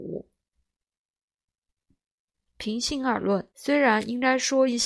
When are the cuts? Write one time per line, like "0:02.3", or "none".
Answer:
0:03.5